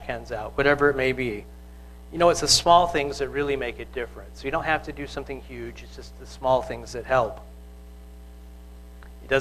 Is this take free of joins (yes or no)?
yes